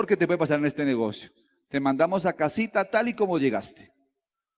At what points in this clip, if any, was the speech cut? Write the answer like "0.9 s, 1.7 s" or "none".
none